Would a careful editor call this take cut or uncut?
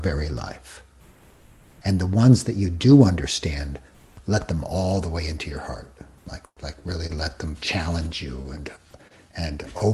uncut